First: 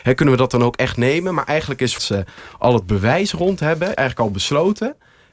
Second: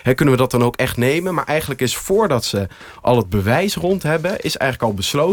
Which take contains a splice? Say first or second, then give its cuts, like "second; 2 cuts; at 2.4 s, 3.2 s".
first; 2 cuts; at 2.0 s, 3.9 s